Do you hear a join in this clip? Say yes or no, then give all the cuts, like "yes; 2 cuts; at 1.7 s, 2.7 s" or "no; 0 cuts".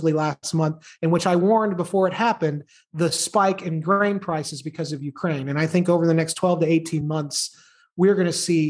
no; 0 cuts